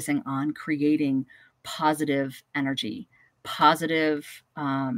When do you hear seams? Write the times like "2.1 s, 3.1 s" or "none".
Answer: none